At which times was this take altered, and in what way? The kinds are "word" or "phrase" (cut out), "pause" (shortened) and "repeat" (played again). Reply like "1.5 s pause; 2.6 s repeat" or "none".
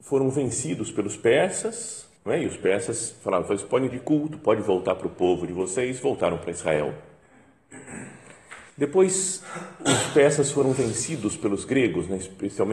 2.2 s pause; 3.9 s phrase; 8.7 s pause